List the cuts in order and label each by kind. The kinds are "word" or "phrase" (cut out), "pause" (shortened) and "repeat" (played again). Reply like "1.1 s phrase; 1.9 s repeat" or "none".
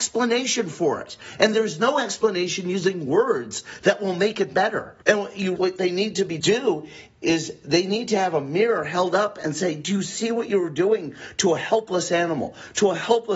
5.0 s pause; 5.6 s word; 6.4 s word